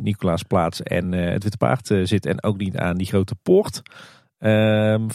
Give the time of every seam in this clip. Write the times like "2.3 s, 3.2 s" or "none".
none